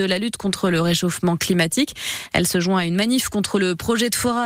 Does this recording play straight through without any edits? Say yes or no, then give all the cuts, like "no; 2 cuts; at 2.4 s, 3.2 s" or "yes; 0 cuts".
yes; 0 cuts